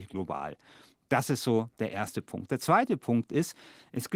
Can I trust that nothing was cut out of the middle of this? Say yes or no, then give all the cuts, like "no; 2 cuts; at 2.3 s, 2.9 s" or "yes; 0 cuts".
yes; 0 cuts